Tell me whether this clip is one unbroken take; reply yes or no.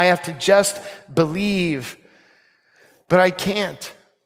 yes